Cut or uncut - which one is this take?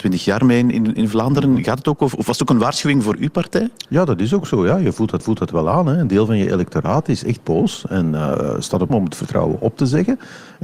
cut